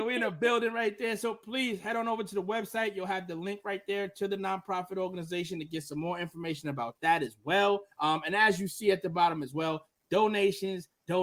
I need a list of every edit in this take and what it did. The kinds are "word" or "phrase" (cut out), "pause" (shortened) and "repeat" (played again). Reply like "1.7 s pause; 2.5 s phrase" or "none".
7.9 s pause